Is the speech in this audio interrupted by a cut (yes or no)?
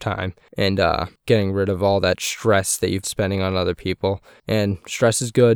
yes